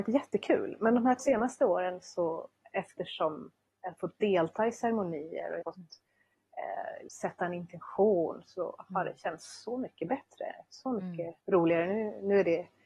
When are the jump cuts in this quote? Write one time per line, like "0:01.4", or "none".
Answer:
0:01.2
0:03.7
0:05.6
0:07.1
0:11.4